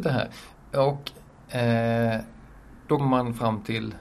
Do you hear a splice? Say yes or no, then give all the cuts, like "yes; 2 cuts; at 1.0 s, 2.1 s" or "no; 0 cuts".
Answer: yes; 1 cut; at 3.0 s